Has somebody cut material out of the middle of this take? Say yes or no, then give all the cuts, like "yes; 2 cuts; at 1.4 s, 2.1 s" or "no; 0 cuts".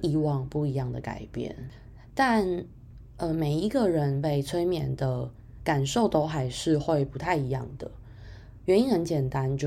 no; 0 cuts